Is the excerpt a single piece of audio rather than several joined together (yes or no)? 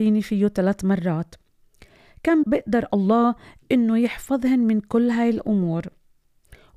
no